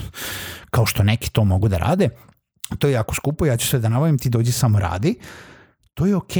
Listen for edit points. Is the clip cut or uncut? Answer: uncut